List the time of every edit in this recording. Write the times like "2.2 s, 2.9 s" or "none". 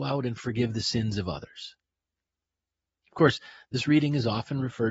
none